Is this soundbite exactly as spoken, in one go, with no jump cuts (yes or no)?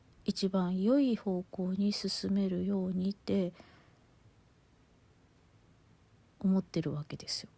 no